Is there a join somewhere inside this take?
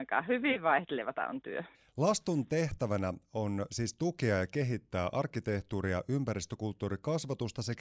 yes; 1 cut; at 1.7 s

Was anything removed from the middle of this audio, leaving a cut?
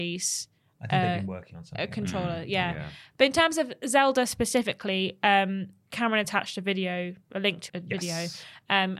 yes; 1 cut; at 7.7 s

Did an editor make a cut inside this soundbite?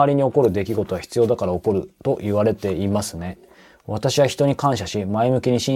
no; 0 cuts

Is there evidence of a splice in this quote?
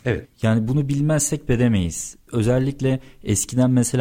yes; 1 cut; at 1.5 s

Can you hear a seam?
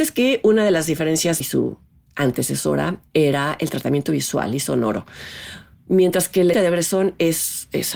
yes; 3 cuts; at 1.4 s, 3.1 s, 6.5 s

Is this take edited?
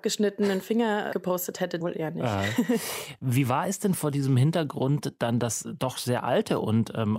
yes; 2 cuts; at 1.1 s, 1.8 s

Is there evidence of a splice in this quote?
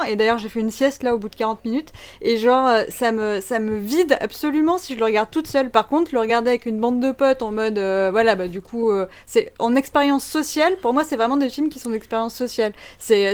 no; 0 cuts

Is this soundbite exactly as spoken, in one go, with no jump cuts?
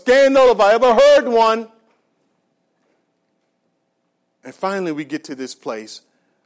yes; 0 cuts

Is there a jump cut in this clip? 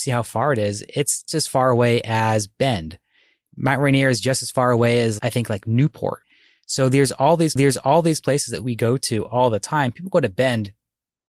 yes; 2 cuts; at 1.3 s, 7.6 s

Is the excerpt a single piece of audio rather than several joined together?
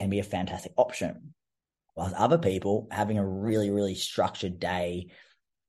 yes; 0 cuts

